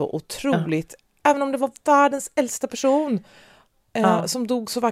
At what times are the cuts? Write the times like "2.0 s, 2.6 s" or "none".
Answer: none